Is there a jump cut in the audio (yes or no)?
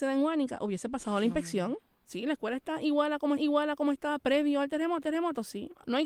yes